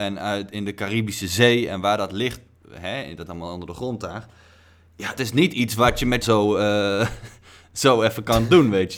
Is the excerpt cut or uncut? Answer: cut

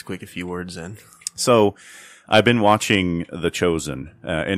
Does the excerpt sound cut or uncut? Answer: uncut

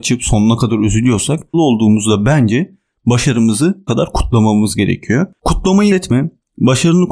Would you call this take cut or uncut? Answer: cut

